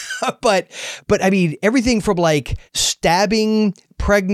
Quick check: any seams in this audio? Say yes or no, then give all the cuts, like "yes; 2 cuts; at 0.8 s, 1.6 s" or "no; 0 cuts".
yes; 1 cut; at 2.7 s